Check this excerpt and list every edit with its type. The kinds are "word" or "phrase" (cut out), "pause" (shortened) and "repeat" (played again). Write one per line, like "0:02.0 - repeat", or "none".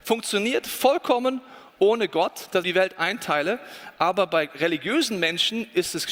0:02.6 - phrase